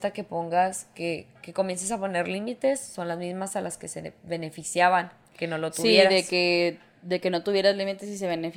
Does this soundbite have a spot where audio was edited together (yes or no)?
no